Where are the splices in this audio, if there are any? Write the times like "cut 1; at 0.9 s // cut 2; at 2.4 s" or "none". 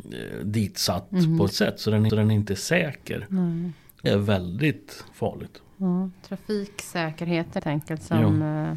cut 1; at 1.5 s // cut 2; at 2.1 s // cut 3; at 4.1 s // cut 4; at 5.1 s // cut 5; at 7.6 s